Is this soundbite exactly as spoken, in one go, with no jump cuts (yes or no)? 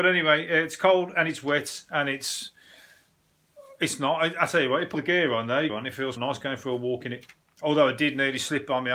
no